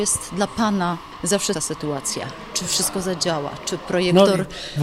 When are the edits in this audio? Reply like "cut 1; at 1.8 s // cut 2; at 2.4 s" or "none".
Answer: cut 1; at 1.5 s